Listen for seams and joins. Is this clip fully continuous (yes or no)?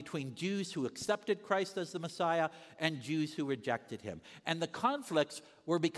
yes